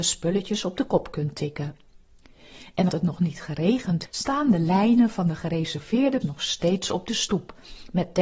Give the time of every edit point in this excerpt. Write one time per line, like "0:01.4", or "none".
0:02.9
0:04.1
0:06.2